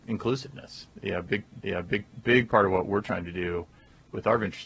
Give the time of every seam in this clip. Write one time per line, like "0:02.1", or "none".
0:01.6